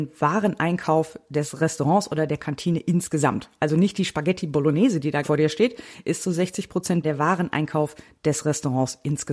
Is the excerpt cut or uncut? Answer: cut